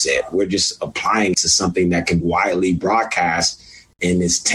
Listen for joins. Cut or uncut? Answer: cut